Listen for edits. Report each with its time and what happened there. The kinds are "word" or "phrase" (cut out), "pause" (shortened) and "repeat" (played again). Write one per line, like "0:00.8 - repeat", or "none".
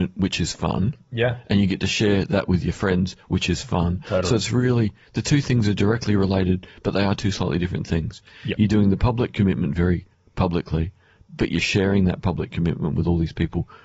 none